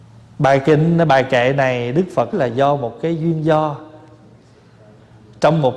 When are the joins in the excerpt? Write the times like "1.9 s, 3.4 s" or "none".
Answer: 2.3 s